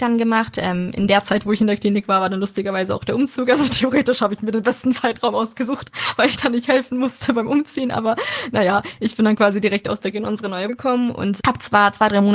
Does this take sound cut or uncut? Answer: cut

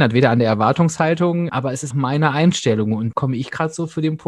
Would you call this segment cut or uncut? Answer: cut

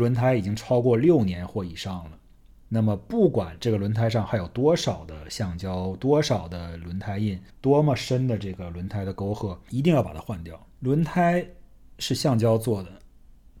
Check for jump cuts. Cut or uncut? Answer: cut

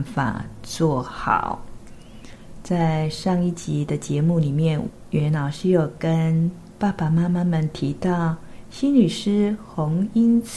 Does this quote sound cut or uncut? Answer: uncut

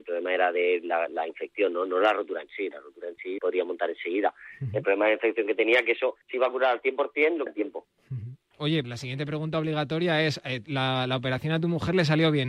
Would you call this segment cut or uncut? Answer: cut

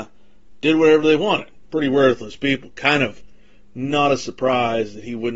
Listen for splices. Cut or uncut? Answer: uncut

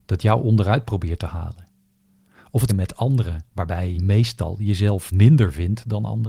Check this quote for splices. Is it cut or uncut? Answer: cut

